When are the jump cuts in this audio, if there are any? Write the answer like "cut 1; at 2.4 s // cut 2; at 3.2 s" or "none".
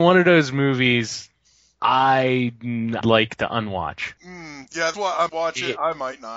cut 1; at 3.0 s // cut 2; at 4.2 s // cut 3; at 4.9 s // cut 4; at 5.3 s